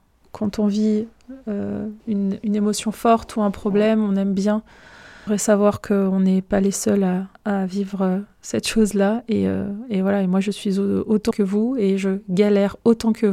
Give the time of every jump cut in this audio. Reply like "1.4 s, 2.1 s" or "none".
2.0 s, 5.3 s, 7.3 s, 11.3 s